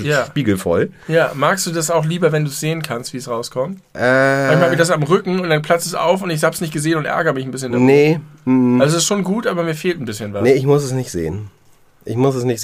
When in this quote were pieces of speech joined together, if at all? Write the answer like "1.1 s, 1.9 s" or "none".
none